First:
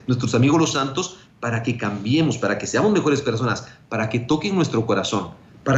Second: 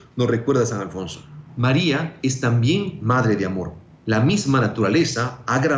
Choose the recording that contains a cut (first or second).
second